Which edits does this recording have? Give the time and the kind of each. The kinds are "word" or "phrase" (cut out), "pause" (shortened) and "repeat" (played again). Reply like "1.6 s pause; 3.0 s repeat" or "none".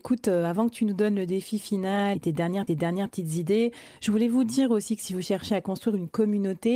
2.2 s word; 2.7 s repeat